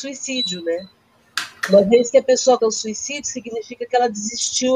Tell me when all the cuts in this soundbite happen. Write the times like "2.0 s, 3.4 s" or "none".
2.6 s